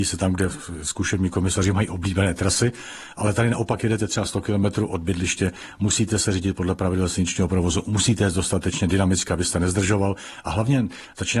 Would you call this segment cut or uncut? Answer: uncut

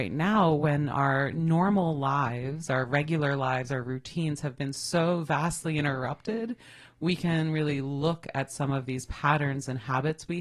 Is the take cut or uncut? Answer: uncut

